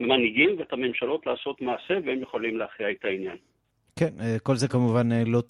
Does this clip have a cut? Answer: no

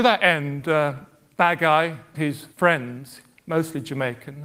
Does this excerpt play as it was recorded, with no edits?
no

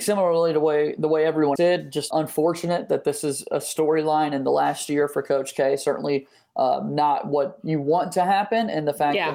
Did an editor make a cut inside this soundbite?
yes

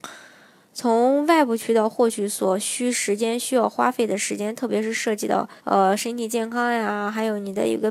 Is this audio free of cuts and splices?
no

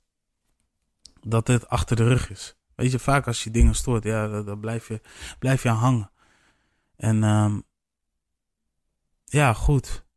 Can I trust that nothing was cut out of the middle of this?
yes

